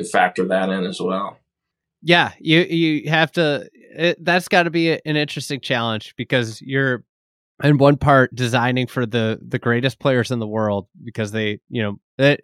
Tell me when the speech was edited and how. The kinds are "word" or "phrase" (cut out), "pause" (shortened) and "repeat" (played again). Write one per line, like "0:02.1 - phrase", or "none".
none